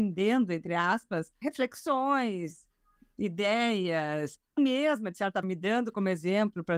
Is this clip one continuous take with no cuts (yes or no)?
no